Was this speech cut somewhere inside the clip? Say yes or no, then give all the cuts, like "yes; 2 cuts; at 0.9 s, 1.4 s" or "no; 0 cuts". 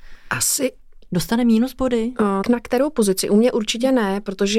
yes; 1 cut; at 2.4 s